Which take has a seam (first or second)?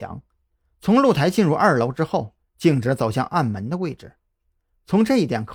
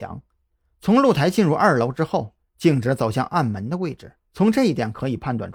second